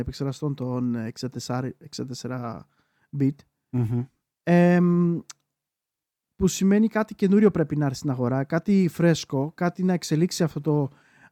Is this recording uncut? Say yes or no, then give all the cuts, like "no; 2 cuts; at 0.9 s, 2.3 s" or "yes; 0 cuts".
yes; 0 cuts